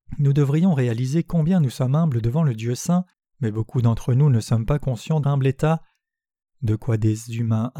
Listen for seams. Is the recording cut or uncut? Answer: cut